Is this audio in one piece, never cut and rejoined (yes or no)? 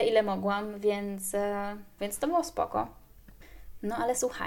no